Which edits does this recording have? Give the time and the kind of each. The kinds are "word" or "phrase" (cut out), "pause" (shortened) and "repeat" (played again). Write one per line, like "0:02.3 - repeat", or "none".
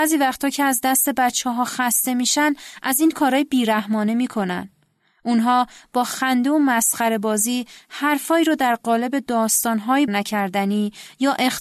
0:10.1 - word